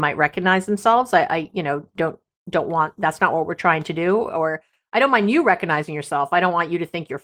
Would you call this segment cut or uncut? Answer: uncut